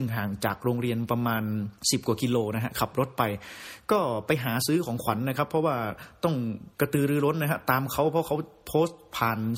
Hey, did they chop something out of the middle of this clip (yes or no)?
yes